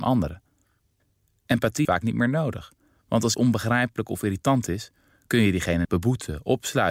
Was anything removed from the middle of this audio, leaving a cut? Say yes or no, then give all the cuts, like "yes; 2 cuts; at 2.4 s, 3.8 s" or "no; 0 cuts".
yes; 3 cuts; at 1.8 s, 3.3 s, 5.8 s